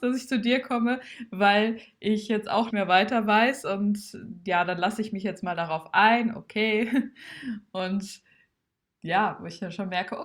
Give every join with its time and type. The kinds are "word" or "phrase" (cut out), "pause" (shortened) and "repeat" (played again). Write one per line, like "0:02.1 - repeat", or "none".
0:02.7 - word

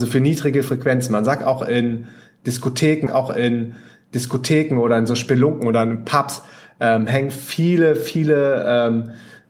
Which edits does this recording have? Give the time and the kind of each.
0:03.1 - repeat

